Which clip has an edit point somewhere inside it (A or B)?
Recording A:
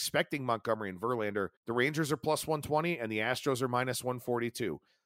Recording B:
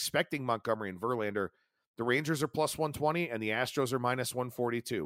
A